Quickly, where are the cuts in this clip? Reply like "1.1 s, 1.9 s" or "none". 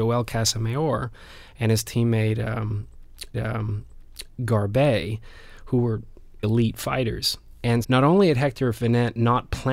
3.3 s, 6.4 s, 7.8 s